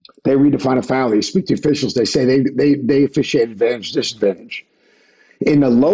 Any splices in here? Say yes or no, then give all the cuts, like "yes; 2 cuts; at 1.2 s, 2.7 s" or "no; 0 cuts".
no; 0 cuts